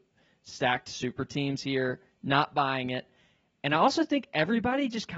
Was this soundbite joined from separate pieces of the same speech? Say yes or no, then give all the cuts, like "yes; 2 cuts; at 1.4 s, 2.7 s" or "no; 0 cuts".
no; 0 cuts